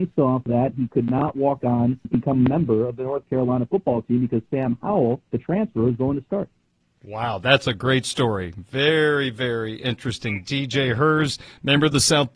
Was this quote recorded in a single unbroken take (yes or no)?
no